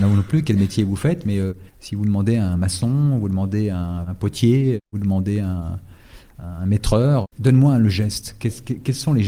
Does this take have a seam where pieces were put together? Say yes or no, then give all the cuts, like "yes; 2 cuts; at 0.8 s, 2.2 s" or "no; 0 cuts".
yes; 3 cuts; at 1.7 s, 4.9 s, 7.3 s